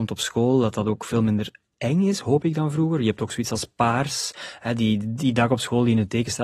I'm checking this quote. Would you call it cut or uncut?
uncut